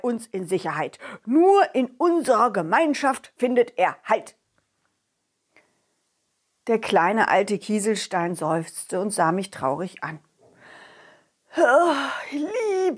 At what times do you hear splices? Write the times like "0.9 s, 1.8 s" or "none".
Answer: none